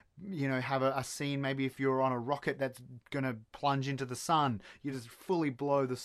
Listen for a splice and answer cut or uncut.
uncut